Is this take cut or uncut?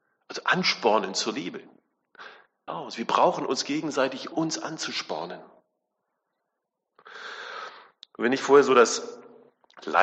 cut